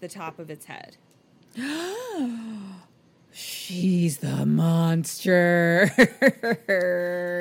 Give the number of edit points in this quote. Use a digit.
0